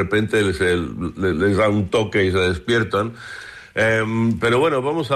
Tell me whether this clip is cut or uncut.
uncut